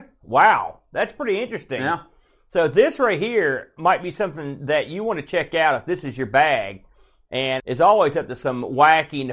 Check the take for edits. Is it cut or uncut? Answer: cut